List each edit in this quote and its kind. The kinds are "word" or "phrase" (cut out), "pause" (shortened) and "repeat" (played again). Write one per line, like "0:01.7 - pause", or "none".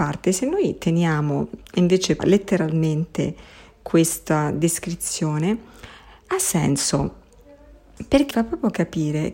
0:02.2 - word
0:08.3 - word